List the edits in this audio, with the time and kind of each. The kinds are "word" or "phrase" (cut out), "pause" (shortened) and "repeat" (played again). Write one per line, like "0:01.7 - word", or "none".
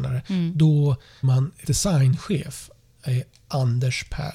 0:01.2 - word
0:01.6 - word